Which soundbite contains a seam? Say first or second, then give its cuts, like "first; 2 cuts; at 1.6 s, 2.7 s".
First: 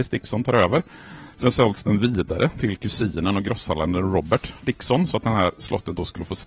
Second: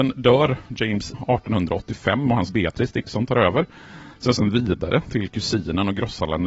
second; 3 cuts; at 1.1 s, 2.5 s, 4.4 s